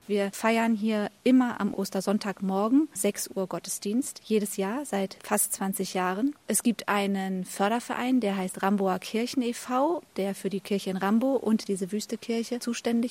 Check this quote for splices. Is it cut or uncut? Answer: cut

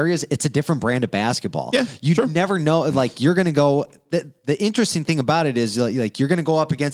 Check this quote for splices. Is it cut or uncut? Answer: uncut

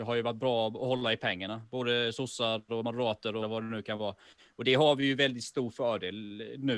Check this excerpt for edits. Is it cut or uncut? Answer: cut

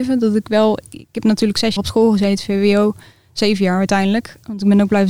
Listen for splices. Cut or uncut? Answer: cut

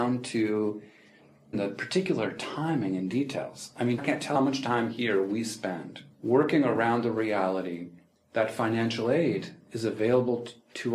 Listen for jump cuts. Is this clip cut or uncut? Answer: cut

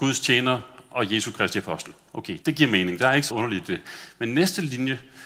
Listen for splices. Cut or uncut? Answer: cut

